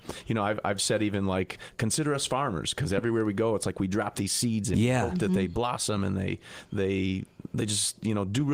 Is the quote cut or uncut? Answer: uncut